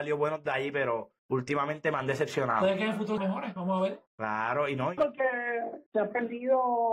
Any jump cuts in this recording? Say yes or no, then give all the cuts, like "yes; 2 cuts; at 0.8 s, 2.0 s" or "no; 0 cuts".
yes; 5 cuts; at 1.2 s, 3.2 s, 4.1 s, 5.0 s, 5.9 s